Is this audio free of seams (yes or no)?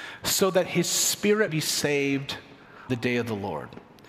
no